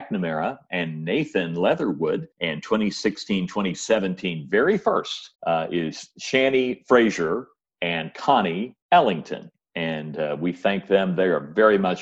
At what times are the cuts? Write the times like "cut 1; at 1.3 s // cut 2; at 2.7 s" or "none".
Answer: cut 1; at 2.3 s // cut 2; at 5.3 s // cut 3; at 8.8 s